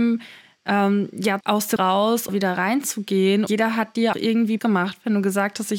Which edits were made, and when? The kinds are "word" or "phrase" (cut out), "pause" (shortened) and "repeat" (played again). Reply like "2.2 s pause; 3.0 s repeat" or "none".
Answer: 1.4 s word; 1.8 s word; 2.3 s word; 3.5 s word; 4.1 s word; 4.6 s word